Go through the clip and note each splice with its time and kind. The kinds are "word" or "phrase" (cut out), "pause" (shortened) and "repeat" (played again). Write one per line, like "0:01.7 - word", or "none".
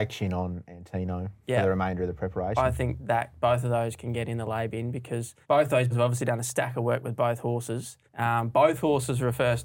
0:05.4 - pause
0:05.9 - word
0:08.1 - pause